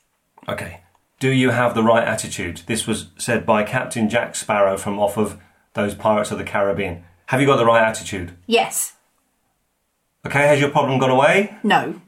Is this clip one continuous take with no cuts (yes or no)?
yes